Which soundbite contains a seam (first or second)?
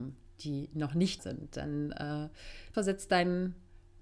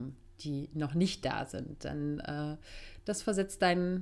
first